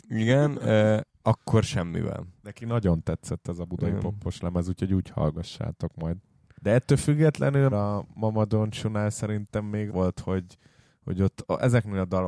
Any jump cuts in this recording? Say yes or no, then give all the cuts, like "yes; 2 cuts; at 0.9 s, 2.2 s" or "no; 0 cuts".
yes; 4 cuts; at 2.4 s, 6.5 s, 7.7 s, 9.9 s